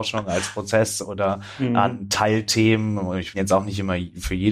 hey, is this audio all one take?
no; 1 cut; at 3.3 s

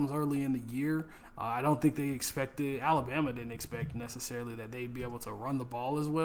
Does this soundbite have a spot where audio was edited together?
no; 0 cuts

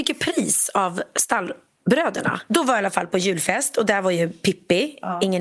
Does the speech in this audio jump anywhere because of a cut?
no; 0 cuts

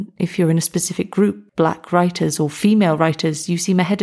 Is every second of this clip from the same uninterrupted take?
no; 1 cut; at 1.5 s

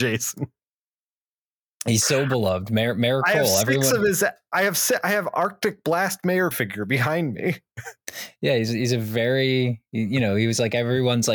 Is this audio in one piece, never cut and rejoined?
no; 1 cut; at 6.5 s

